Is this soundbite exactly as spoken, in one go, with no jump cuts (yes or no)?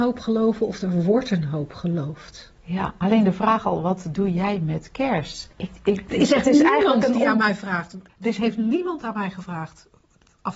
no